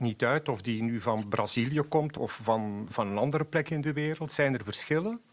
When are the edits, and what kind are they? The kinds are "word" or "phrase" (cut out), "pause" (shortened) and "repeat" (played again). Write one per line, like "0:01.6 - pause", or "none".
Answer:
none